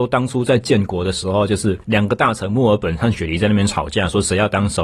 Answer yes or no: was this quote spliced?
yes